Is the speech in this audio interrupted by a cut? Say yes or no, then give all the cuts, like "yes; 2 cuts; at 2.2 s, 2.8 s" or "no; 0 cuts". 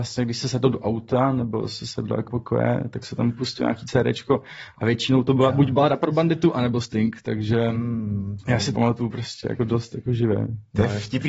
yes; 2 cuts; at 2.3 s, 8.7 s